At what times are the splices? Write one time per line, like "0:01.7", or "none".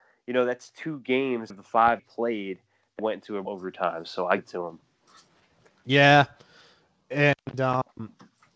0:01.5
0:02.0
0:03.0
0:03.5
0:04.4